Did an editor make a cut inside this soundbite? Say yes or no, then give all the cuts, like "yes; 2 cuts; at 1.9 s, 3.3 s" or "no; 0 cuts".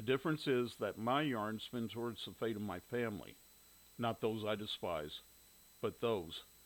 no; 0 cuts